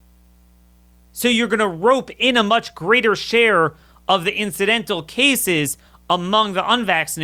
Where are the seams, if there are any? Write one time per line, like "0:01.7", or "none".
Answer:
none